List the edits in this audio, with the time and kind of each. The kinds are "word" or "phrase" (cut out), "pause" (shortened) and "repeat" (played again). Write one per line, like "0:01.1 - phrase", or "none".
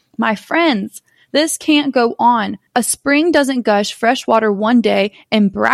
0:02.7 - pause